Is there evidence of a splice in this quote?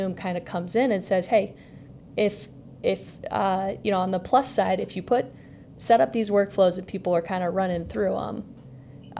no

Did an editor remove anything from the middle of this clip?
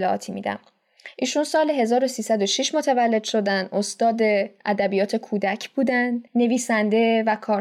yes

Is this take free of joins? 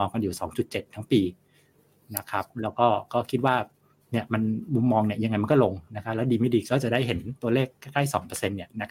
yes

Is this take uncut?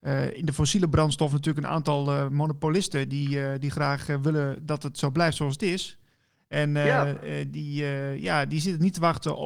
yes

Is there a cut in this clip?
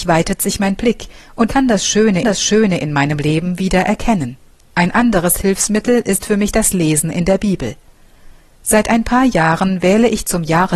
yes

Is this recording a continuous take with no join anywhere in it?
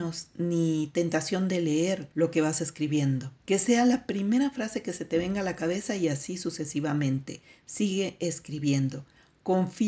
no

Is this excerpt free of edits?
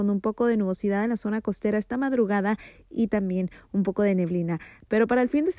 yes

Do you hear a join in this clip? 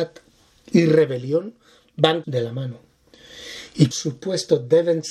yes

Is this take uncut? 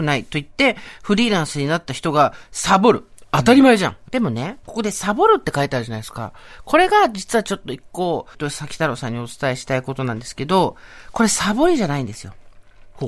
no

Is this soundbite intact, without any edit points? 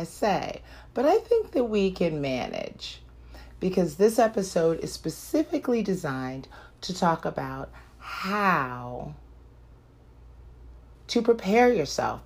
no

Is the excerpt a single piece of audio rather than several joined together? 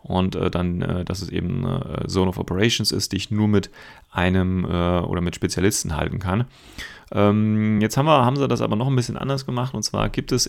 yes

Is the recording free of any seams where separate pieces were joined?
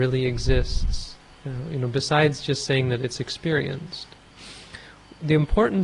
yes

